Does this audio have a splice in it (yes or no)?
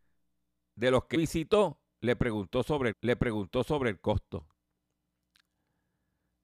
yes